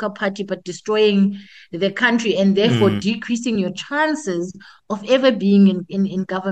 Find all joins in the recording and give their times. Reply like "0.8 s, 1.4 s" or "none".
none